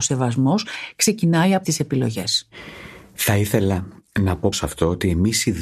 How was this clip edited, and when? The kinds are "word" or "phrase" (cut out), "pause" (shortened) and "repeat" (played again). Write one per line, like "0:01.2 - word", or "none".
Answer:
0:01.6 - word
0:04.5 - word